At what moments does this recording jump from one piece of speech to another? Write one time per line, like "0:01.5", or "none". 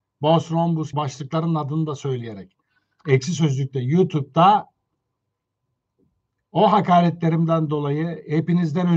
0:00.9